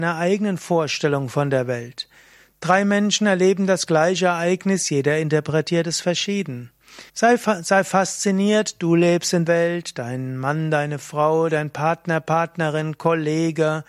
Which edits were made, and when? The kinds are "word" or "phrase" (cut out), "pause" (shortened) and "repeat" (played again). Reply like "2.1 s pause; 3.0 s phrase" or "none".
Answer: 7.1 s pause; 9.5 s word

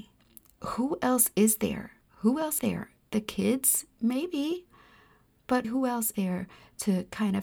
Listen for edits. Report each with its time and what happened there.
2.0 s pause; 2.6 s word; 5.6 s word; 6.1 s word

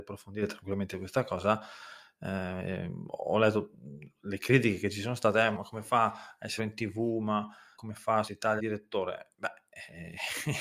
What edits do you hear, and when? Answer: 0.9 s phrase; 5.5 s word; 6.6 s word; 7.8 s word; 8.3 s word; 8.6 s phrase

